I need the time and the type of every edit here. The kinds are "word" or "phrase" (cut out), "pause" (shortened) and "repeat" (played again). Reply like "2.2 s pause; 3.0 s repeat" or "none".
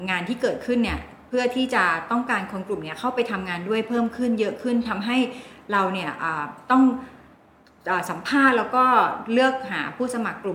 none

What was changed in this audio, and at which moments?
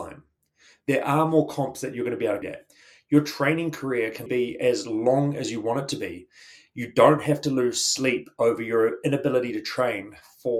2.4 s word; 4.3 s word

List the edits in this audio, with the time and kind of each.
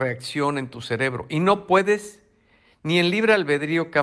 none

